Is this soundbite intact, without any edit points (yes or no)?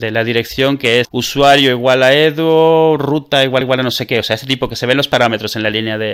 no